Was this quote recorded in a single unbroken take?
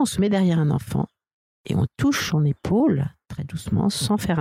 yes; 0 cuts

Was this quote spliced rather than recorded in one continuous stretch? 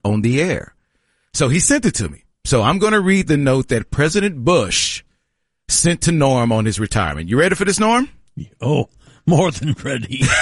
no; 0 cuts

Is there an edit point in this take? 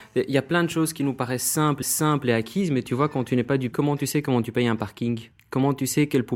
yes; 2 cuts; at 1.8 s, 3.7 s

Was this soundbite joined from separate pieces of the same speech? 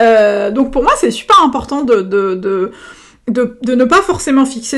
no; 0 cuts

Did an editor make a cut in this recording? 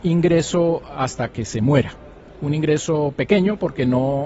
no; 0 cuts

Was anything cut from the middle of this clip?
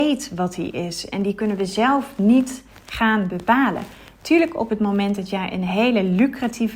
no; 0 cuts

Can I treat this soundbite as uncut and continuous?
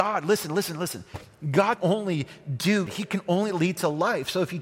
no; 2 cuts; at 1.8 s, 2.9 s

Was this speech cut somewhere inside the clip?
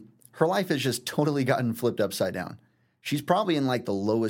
no; 0 cuts

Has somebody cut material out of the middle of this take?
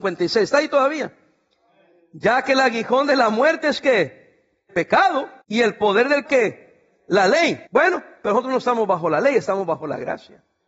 yes; 4 cuts; at 4.7 s, 5.4 s, 6.2 s, 7.7 s

